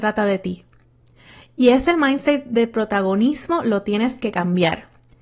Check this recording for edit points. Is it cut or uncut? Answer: uncut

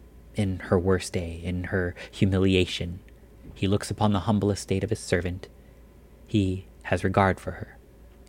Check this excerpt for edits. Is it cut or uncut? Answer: uncut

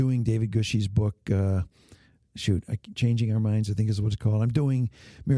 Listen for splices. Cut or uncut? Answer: uncut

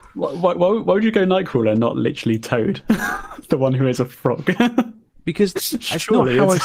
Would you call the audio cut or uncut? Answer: uncut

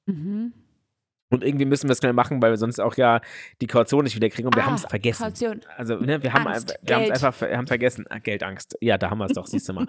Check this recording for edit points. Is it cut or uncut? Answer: cut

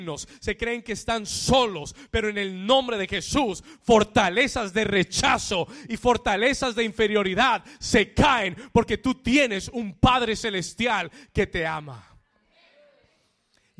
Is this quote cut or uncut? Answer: uncut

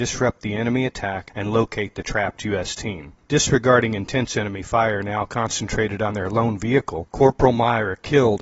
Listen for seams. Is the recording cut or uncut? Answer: cut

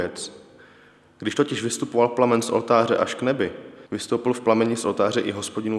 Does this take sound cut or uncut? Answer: cut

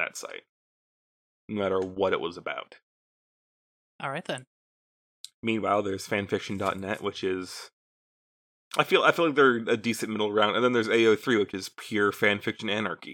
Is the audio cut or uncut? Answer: uncut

